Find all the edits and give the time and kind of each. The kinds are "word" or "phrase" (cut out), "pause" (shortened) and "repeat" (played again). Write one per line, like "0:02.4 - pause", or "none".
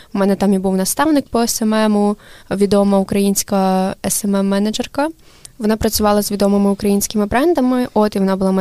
0:02.4 - pause